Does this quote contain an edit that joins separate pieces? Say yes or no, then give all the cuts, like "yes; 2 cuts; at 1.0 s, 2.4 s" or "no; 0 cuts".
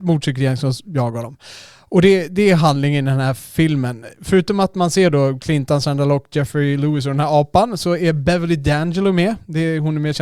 no; 0 cuts